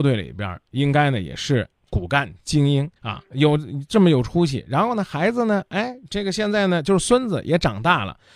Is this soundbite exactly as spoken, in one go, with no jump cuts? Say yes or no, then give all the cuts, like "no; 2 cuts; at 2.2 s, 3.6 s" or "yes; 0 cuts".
no; 1 cut; at 3.0 s